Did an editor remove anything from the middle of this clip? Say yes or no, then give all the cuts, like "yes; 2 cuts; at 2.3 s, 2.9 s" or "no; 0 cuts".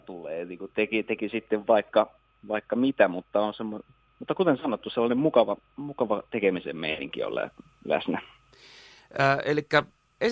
no; 0 cuts